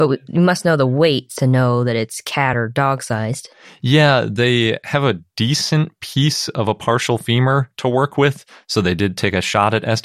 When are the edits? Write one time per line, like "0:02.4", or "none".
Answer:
none